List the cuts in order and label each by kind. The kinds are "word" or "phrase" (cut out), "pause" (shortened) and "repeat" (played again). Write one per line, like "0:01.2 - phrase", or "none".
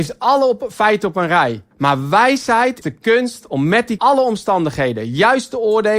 0:01.7 - pause
0:02.8 - word
0:04.0 - phrase